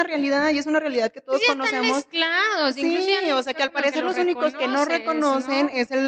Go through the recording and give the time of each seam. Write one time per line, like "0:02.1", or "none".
none